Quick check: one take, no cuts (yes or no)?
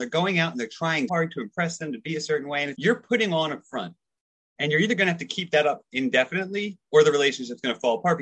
no